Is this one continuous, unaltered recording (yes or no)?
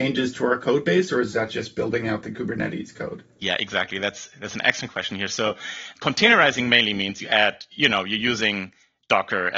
yes